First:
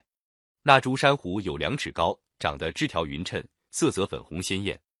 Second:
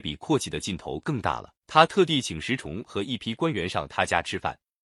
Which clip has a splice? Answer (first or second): second